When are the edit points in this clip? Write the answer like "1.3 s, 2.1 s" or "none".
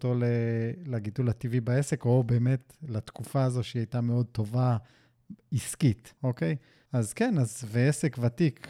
6.2 s, 6.9 s